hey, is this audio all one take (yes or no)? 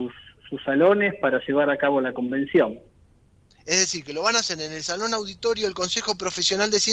yes